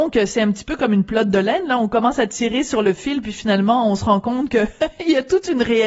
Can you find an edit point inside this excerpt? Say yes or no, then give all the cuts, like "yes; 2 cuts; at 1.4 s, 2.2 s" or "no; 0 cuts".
no; 0 cuts